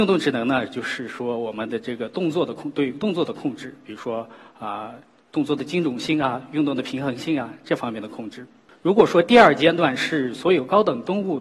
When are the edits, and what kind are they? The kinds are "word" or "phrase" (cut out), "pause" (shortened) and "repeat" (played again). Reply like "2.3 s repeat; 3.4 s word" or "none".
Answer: none